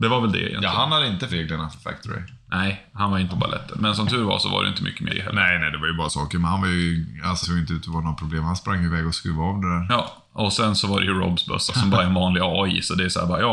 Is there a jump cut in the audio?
yes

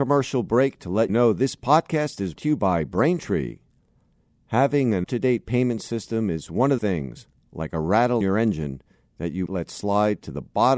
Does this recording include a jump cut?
yes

